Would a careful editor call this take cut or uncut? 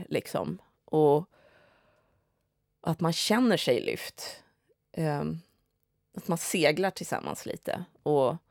cut